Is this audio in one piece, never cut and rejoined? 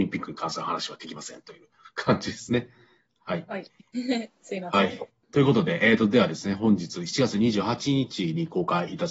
yes; 0 cuts

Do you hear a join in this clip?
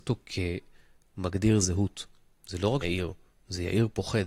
yes; 1 cut; at 2.8 s

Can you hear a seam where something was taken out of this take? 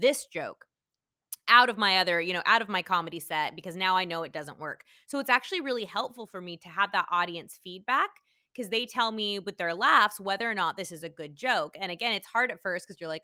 no; 0 cuts

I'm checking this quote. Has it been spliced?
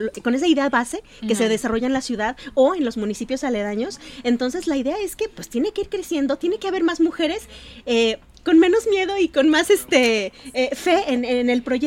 no; 0 cuts

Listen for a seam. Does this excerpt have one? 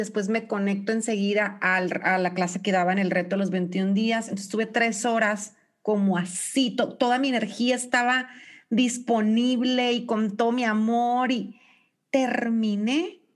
no; 0 cuts

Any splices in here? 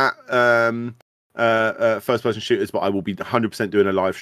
no; 0 cuts

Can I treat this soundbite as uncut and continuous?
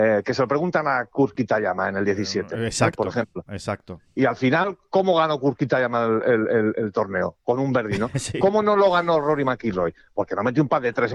yes; 0 cuts

